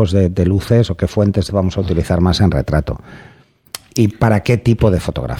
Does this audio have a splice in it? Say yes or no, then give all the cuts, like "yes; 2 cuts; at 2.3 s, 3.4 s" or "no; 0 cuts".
yes; 1 cut; at 1.5 s